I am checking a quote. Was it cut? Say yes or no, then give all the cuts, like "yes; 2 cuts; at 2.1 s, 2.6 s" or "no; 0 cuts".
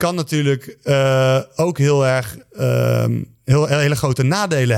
yes; 1 cut; at 3.3 s